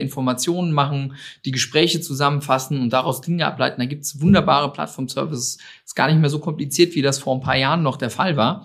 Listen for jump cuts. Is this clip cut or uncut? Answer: uncut